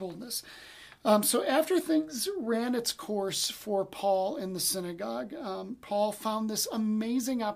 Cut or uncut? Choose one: uncut